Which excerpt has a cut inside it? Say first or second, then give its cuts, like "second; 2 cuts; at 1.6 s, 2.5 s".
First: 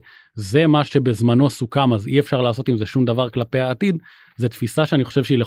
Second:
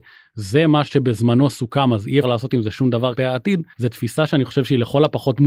second; 3 cuts; at 2.2 s, 3.2 s, 3.7 s